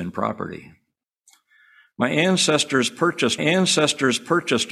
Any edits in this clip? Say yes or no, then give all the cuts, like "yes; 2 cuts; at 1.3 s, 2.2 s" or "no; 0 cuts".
yes; 1 cut; at 3.4 s